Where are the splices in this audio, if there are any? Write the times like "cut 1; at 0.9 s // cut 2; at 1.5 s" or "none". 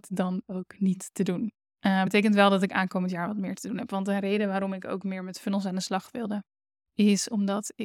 none